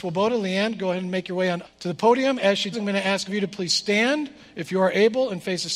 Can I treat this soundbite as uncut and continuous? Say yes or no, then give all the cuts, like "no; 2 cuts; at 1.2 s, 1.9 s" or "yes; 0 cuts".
no; 3 cuts; at 1.6 s, 2.7 s, 3.3 s